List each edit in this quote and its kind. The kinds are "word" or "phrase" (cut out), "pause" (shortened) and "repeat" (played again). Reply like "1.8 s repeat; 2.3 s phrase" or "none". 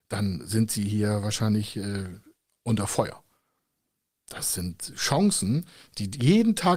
none